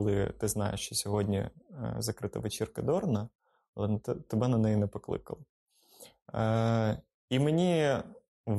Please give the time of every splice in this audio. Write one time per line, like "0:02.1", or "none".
none